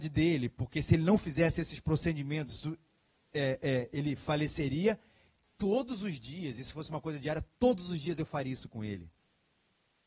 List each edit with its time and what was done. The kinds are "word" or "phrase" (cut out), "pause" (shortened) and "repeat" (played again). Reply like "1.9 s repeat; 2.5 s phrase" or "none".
none